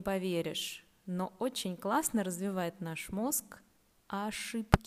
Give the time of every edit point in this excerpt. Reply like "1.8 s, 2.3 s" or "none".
none